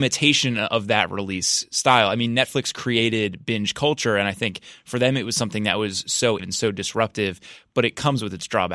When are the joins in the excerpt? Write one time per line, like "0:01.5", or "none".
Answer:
0:06.4